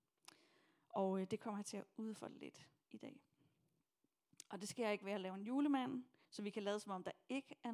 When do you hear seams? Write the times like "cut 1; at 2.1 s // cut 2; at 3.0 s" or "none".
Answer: cut 1; at 6.2 s